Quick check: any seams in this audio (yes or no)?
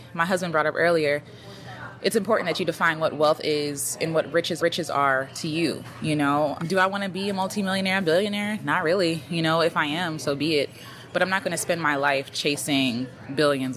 yes